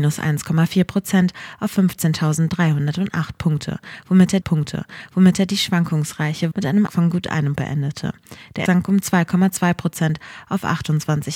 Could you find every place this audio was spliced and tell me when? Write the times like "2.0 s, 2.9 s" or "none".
4.4 s, 6.5 s, 6.9 s, 7.6 s, 8.7 s